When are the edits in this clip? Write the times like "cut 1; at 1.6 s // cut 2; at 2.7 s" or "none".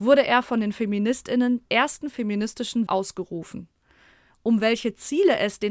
cut 1; at 1.7 s // cut 2; at 2.9 s

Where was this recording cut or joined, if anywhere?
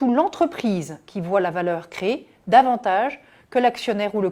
none

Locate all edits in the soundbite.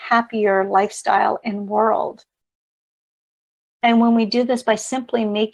none

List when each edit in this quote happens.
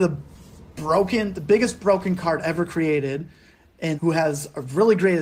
cut 1; at 4.0 s

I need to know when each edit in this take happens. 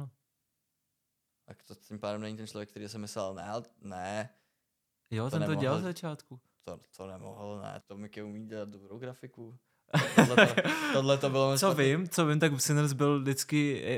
cut 1; at 7.8 s

